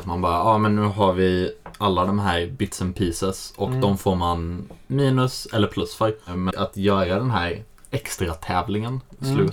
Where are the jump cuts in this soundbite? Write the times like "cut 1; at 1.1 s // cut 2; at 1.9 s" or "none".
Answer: cut 1; at 6.5 s